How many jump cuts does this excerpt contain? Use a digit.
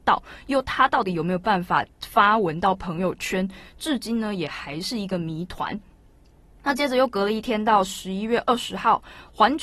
0